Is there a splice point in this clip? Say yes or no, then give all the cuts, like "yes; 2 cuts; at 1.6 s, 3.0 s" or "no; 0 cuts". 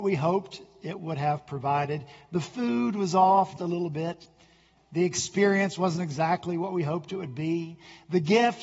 yes; 1 cut; at 3.6 s